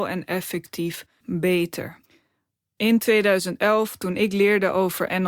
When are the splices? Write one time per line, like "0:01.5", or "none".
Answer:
0:01.2